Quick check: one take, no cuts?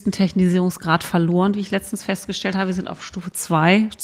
yes; 0 cuts

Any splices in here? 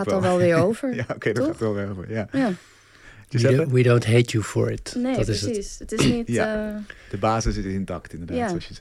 no; 0 cuts

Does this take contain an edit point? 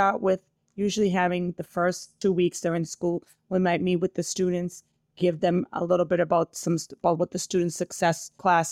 no; 0 cuts

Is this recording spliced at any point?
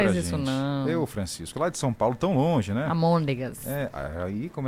no; 0 cuts

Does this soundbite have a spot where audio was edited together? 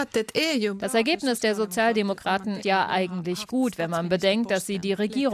yes; 1 cut; at 2.6 s

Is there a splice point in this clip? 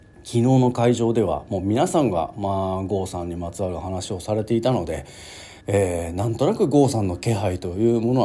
yes; 1 cut; at 5.6 s

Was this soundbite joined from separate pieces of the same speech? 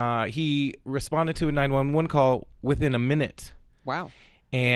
no; 0 cuts

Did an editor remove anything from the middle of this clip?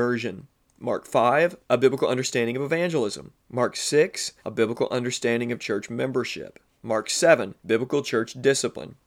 yes; 4 cuts; at 1.6 s, 3.4 s, 4.4 s, 7.6 s

